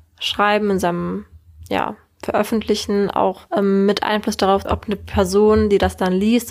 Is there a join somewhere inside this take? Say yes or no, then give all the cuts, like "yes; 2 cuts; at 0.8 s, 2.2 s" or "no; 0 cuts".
yes; 2 cuts; at 3.5 s, 4.6 s